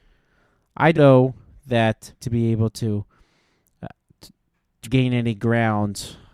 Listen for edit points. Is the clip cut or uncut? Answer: cut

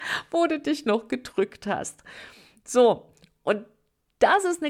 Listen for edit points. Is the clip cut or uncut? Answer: uncut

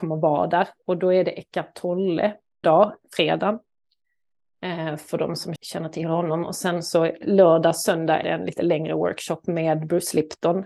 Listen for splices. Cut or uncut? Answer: cut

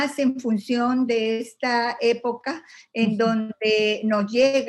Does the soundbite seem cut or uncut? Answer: uncut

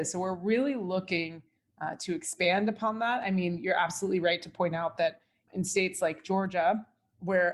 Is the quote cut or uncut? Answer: uncut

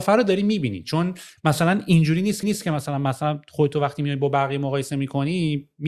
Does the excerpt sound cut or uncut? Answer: cut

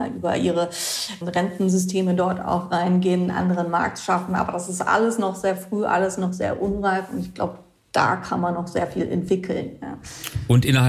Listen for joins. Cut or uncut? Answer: cut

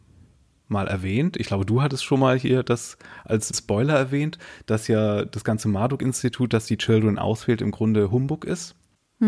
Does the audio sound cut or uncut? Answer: cut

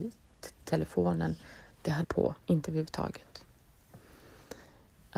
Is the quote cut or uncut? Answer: cut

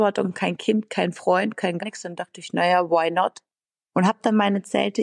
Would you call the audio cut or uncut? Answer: cut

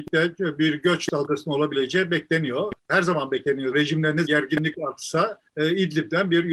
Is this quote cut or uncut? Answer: cut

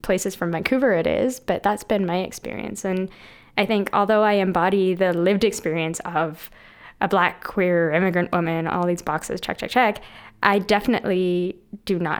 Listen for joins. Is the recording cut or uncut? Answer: uncut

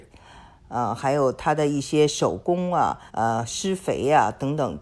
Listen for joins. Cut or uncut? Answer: cut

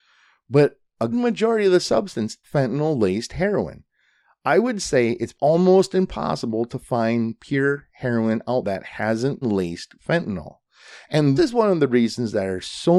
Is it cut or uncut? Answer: cut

